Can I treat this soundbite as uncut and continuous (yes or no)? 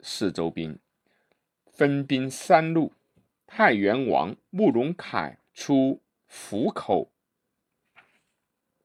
no